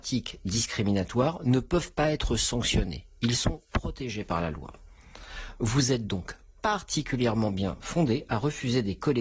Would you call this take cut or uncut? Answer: uncut